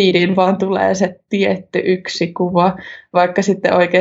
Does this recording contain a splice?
no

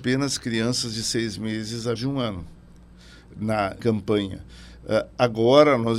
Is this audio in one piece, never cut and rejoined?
no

